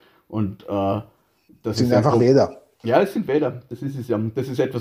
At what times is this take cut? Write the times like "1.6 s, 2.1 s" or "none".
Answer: none